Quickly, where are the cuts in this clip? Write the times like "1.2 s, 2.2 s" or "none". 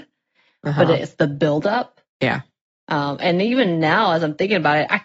2.1 s